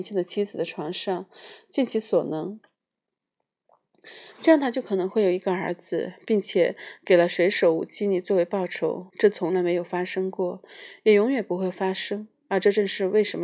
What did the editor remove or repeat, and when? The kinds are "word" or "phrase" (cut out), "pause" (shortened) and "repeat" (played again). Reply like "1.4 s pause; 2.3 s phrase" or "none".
9.1 s pause